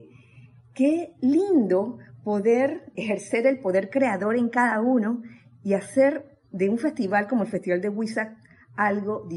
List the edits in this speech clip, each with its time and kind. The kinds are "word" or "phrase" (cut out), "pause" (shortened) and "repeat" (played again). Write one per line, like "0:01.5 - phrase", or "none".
0:02.9 - word